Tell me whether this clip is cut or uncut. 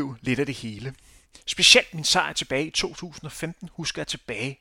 uncut